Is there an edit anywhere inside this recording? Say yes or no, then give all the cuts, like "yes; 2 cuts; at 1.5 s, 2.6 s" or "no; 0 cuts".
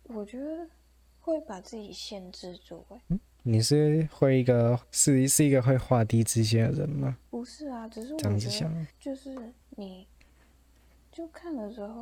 yes; 5 cuts; at 3.0 s, 4.8 s, 7.3 s, 8.9 s, 9.6 s